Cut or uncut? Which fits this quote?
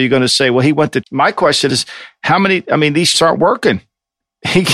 cut